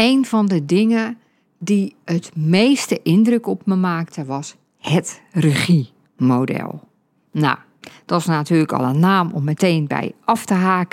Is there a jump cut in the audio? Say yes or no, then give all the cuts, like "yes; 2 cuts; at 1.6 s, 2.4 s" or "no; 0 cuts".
no; 0 cuts